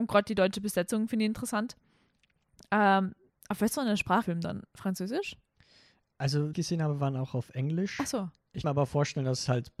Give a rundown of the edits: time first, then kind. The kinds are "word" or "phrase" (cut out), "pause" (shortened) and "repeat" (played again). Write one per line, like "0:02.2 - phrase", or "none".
0:04.2 - phrase
0:06.5 - phrase
0:08.6 - word